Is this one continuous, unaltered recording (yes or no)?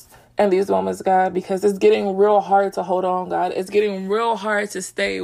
yes